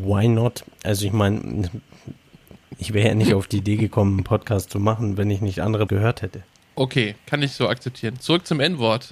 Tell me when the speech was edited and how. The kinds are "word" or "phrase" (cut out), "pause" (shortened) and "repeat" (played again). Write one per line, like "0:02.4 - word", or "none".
0:05.9 - word
0:07.2 - pause